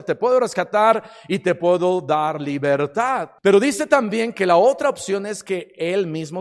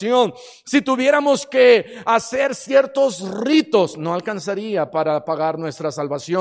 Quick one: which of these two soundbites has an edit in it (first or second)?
first